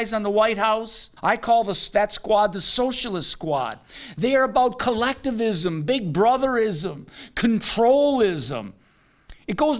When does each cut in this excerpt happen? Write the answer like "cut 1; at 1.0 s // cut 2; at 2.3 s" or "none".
cut 1; at 1.2 s

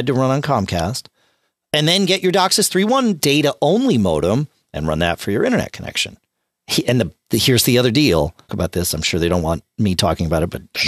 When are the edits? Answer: cut 1; at 8.5 s

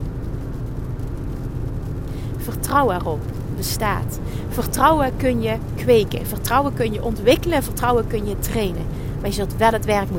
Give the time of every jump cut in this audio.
cut 1; at 3.6 s

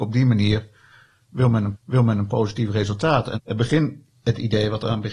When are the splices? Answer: cut 1; at 1.7 s // cut 2; at 3.3 s

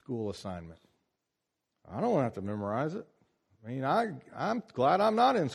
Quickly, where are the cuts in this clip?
cut 1; at 1.2 s

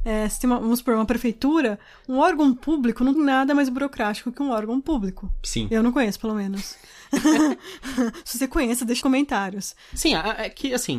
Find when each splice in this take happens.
cut 1; at 3.1 s // cut 2; at 9.0 s

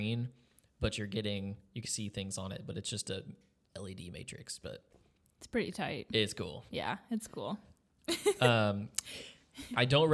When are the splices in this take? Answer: cut 1; at 1.8 s

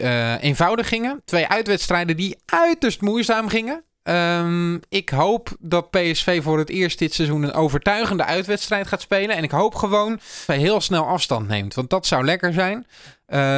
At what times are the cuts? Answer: cut 1; at 10.5 s

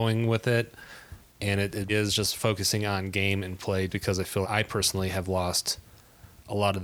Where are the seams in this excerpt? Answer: cut 1; at 1.9 s // cut 2; at 3.9 s // cut 3; at 4.4 s

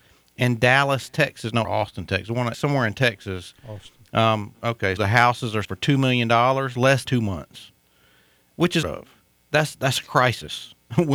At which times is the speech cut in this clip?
cut 1; at 1.6 s // cut 2; at 2.5 s // cut 3; at 5.0 s // cut 4; at 5.6 s // cut 5; at 7.1 s // cut 6; at 8.8 s

